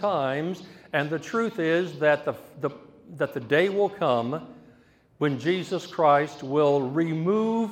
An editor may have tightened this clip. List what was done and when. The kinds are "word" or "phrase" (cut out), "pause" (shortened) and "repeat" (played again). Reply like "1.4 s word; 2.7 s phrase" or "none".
none